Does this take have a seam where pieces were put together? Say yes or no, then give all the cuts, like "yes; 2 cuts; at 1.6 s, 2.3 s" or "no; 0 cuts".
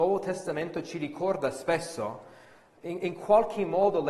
no; 0 cuts